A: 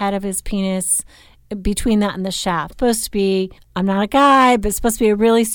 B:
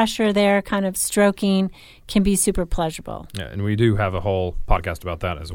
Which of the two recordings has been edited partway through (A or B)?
A